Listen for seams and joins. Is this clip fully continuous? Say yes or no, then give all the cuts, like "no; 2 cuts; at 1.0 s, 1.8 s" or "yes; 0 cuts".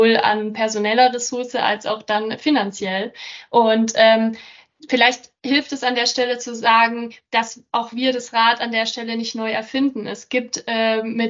yes; 0 cuts